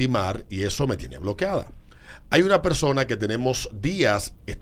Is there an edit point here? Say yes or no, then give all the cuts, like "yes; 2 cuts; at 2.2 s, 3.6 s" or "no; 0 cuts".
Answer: no; 0 cuts